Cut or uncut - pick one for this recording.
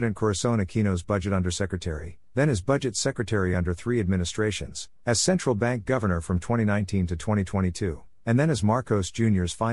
uncut